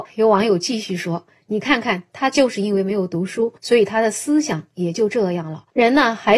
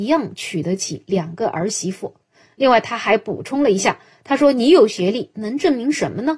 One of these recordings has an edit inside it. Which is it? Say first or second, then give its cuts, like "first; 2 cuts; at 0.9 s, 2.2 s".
first; 1 cut; at 3.6 s